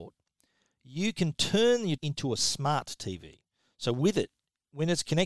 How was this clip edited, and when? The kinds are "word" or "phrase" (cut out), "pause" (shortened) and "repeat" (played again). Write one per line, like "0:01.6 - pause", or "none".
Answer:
0:02.0 - word